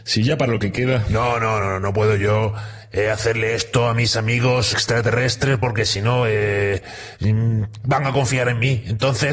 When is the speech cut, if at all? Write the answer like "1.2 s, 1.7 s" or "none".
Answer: 1.6 s, 4.7 s

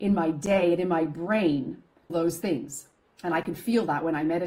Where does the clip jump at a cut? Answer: 2.1 s, 3.0 s

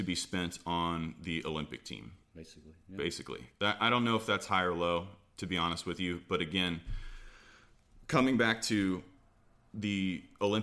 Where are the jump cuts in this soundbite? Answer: 2.2 s

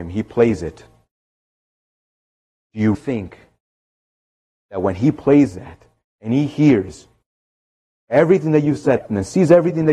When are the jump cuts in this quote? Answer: 2.9 s, 9.0 s

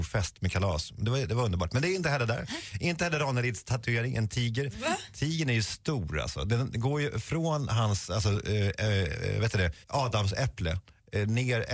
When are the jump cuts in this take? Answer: 9.8 s

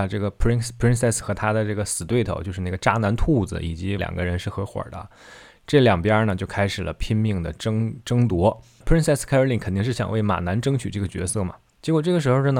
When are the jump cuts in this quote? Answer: 1.2 s, 4.0 s

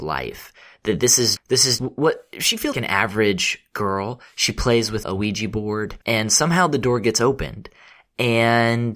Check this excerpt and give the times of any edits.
1.4 s, 1.8 s, 2.7 s, 5.0 s, 6.0 s

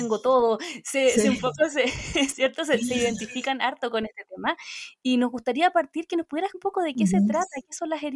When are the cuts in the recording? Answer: 6.5 s

